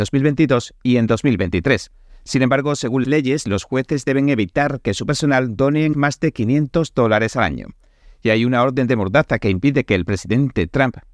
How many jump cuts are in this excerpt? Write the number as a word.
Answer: two